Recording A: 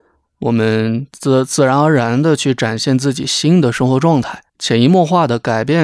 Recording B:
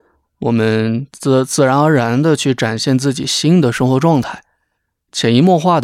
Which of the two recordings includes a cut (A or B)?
A